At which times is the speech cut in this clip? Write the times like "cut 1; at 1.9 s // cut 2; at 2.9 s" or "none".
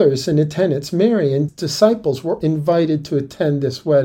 cut 1; at 1.5 s // cut 2; at 2.4 s